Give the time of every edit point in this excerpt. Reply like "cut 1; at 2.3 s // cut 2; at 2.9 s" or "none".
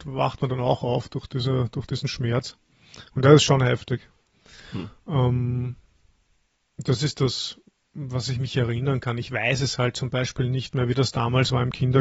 none